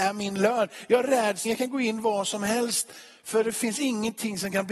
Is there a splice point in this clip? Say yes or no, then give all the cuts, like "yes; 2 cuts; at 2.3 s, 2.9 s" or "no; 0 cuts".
yes; 1 cut; at 1.4 s